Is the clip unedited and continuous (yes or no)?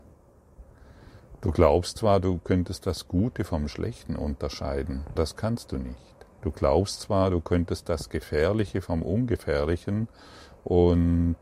no